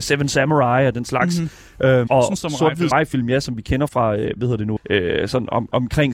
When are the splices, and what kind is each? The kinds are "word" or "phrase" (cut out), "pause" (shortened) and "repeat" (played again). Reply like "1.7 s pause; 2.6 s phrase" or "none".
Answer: 2.1 s word; 2.4 s word; 2.9 s word; 3.9 s word; 4.8 s word